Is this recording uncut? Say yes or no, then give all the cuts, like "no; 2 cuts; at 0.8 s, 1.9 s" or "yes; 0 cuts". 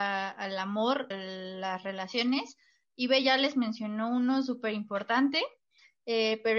no; 1 cut; at 1.1 s